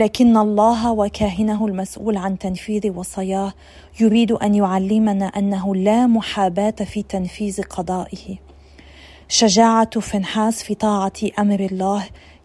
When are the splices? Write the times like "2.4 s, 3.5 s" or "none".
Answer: none